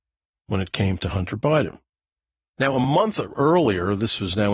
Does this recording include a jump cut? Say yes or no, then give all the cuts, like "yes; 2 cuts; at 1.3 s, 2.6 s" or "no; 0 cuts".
no; 0 cuts